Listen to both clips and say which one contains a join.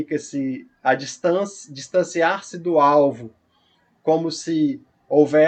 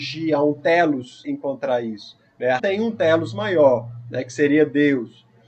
second; 2 cuts; at 1.2 s, 2.6 s

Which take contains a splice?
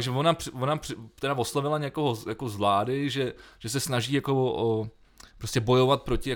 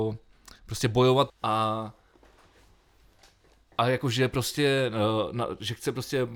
second; 1 cut; at 1.3 s

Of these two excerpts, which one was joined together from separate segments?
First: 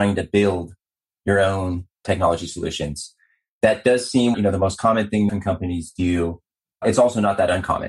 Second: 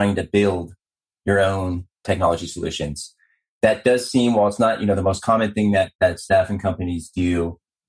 first; 2 cuts; at 4.3 s, 5.3 s

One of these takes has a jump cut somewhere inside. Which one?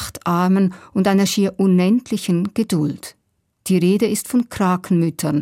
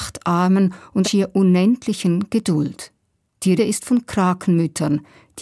second; 2 cuts; at 1.0 s, 3.6 s

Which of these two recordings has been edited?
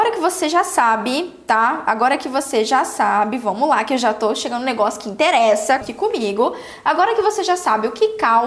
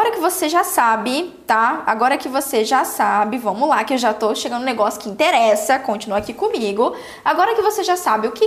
first; 1 cut; at 5.8 s

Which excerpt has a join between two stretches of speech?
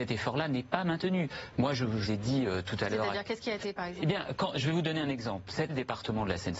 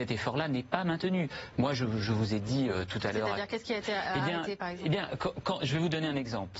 first; 4 cuts; at 2.1 s, 3.6 s, 4.4 s, 5.7 s

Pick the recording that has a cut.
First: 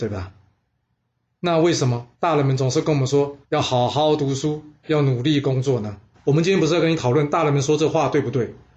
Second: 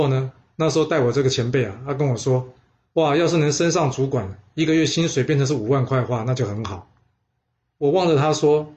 first; 3 cuts; at 2.1 s, 3.4 s, 6.1 s

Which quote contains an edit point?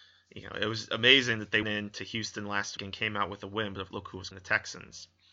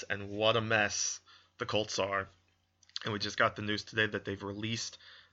first; 4 cuts; at 1.6 s, 2.8 s, 3.9 s, 4.3 s

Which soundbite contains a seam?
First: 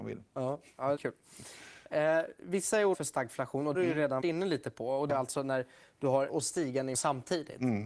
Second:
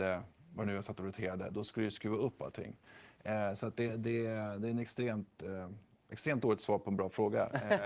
first; 7 cuts; at 1.0 s, 2.9 s, 3.7 s, 4.2 s, 5.1 s, 6.3 s, 6.9 s

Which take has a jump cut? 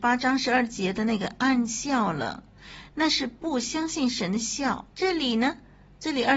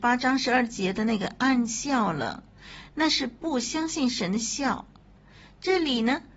first; 1 cut; at 4.9 s

